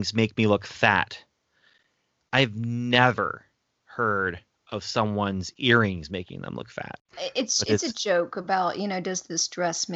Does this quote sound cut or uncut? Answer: uncut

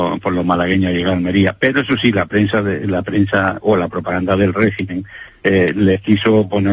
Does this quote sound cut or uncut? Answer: uncut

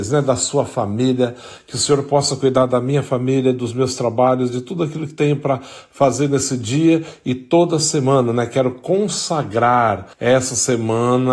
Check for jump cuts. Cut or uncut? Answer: cut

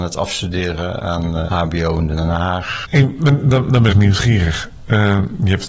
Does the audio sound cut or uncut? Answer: cut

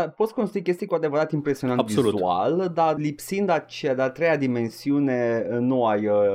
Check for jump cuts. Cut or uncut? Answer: cut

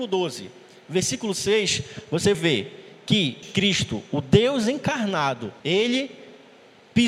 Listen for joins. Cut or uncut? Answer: cut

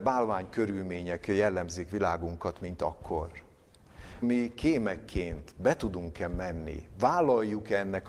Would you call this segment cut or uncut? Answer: cut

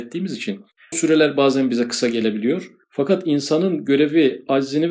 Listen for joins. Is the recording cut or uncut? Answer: cut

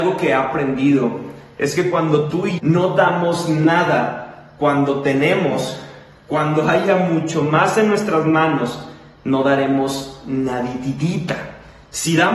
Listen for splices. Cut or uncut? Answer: cut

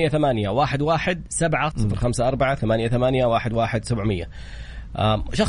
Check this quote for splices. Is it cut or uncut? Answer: cut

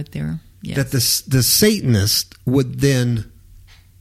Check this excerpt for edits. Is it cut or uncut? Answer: uncut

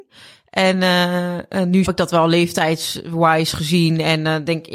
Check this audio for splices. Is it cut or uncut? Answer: cut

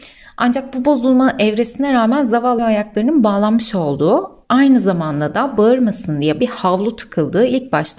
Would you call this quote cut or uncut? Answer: cut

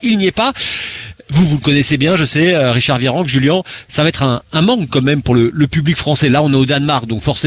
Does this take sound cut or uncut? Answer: uncut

